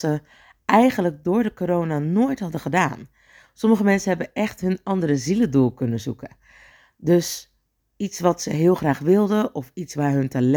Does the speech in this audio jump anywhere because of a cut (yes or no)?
no